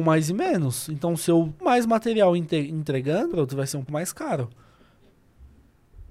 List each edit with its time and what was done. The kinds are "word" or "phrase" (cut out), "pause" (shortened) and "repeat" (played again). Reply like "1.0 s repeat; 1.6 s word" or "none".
1.6 s word; 3.3 s word; 3.9 s word